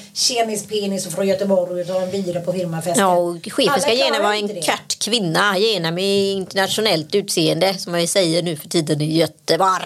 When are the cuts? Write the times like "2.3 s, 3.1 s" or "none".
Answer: none